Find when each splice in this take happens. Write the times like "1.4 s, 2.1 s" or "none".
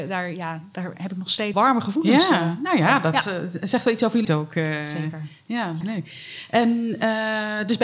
1.5 s, 4.2 s, 5.8 s